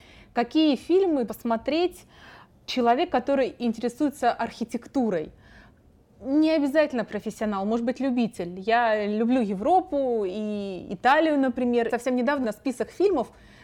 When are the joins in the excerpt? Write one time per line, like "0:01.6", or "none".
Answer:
0:01.3
0:11.9
0:12.4